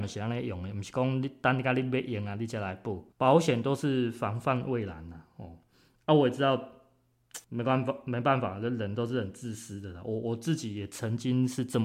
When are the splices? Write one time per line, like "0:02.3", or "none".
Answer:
0:03.1
0:07.4